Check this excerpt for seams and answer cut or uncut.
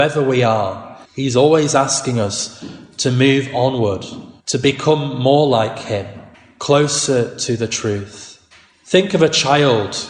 cut